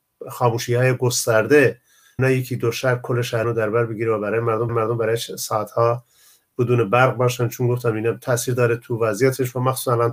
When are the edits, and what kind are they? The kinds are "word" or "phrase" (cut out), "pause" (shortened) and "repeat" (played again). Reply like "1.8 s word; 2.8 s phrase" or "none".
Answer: 2.2 s word; 3.4 s word; 4.7 s repeat